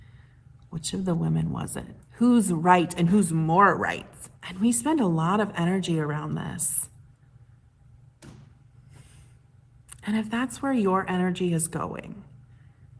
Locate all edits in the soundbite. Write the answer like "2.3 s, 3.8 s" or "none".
2.0 s, 4.4 s

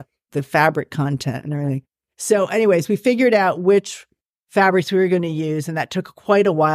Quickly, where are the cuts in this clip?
none

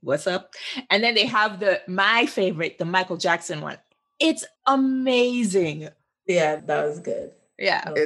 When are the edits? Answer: 4.5 s

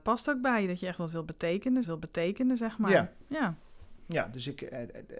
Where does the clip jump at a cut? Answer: 1.8 s

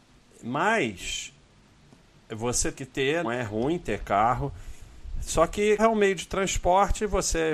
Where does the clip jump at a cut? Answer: 2.7 s, 3.2 s, 5.8 s

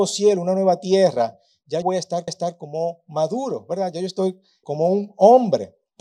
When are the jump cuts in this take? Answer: 1.8 s, 2.3 s, 4.6 s

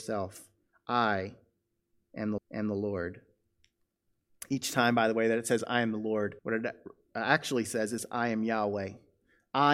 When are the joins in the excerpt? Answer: 2.4 s, 6.4 s

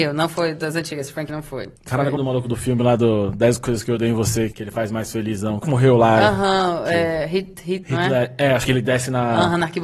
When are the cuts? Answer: 1.3 s, 1.8 s, 2.2 s, 4.5 s, 5.6 s, 7.8 s, 8.7 s

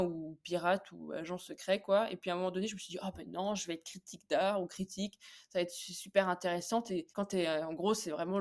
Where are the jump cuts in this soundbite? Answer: 7.1 s

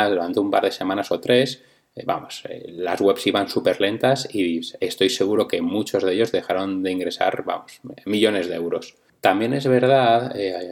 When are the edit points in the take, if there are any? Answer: none

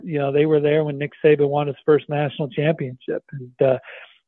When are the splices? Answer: none

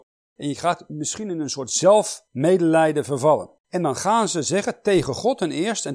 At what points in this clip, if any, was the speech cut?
2.3 s, 3.6 s

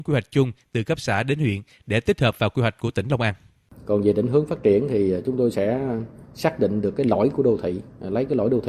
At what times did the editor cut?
none

